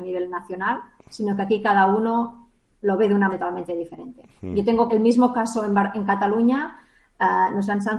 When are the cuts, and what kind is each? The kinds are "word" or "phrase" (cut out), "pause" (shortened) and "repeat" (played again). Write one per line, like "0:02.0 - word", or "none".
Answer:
0:03.3 - word
0:04.9 - word